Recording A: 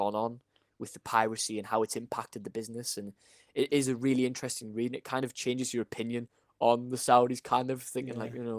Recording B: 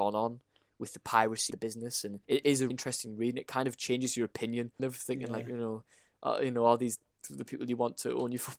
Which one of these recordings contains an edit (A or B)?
B